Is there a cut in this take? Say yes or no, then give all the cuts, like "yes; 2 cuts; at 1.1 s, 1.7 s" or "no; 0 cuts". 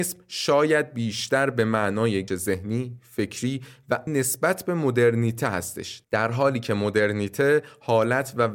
yes; 2 cuts; at 2.3 s, 4.1 s